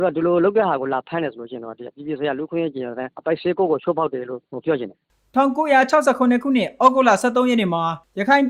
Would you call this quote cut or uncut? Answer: uncut